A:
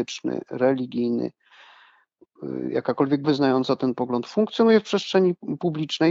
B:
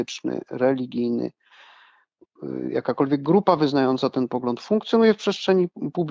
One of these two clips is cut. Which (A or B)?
A